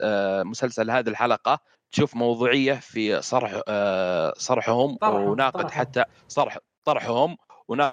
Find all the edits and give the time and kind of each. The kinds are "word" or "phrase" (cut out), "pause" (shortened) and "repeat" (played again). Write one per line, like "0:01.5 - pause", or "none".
none